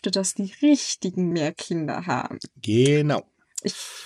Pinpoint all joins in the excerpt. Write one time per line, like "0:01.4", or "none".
0:01.3